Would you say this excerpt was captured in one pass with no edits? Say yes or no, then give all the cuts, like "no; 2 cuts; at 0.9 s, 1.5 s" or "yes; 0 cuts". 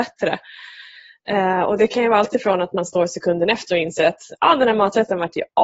yes; 0 cuts